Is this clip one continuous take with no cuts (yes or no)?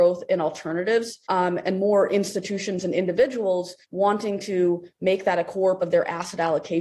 no